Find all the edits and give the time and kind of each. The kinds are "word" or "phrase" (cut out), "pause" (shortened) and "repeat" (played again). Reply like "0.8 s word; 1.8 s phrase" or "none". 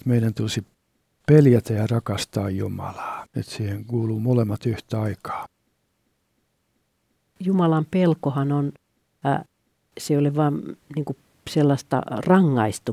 3.3 s pause